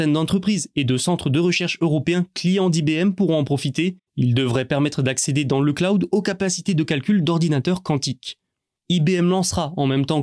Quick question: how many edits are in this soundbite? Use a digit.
1